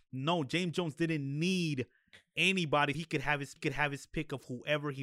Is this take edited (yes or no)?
yes